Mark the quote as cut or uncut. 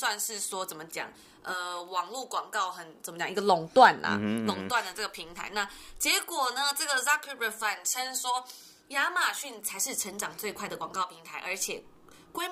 uncut